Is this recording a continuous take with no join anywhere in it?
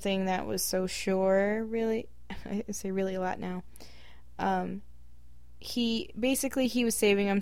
yes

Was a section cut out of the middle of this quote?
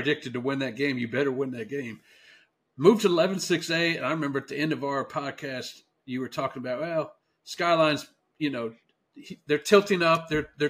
no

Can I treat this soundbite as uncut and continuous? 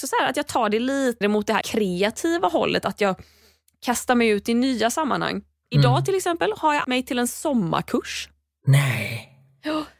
no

